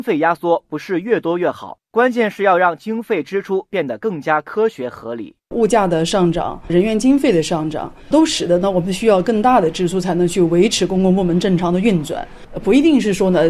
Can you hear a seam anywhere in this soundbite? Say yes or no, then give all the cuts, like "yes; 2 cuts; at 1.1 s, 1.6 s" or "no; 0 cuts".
yes; 1 cut; at 6.7 s